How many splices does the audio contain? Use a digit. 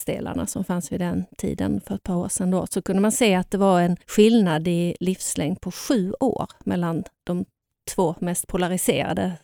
1